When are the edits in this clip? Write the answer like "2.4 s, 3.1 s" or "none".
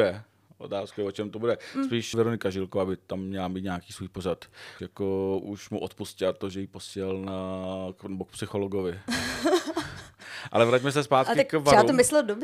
2.1 s, 4.8 s